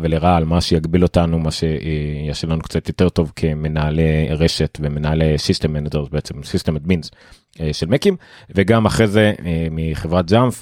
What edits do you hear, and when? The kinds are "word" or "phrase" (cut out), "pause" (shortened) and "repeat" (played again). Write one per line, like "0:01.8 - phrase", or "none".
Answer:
none